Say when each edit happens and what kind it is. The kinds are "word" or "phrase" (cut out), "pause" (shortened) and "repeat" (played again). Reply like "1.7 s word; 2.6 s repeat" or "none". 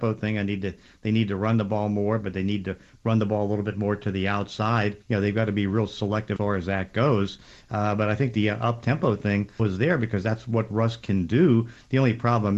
5.0 s pause; 6.4 s word; 9.6 s word